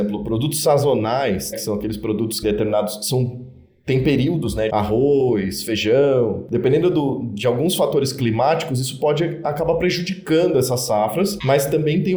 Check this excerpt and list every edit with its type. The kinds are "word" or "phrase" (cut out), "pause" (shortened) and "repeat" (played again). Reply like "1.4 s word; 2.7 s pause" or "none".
1.5 s word; 2.4 s phrase; 4.7 s phrase